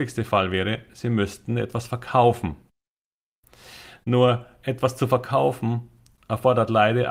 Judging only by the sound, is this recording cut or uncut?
uncut